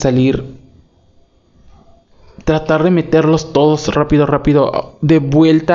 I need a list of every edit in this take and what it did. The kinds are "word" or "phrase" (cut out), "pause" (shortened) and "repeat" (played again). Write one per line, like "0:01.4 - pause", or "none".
0:03.9 - word